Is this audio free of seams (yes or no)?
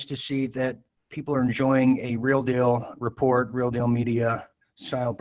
yes